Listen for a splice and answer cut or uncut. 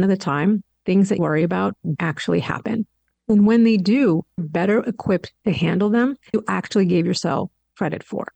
cut